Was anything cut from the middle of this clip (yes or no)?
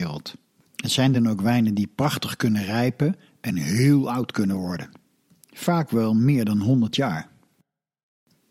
no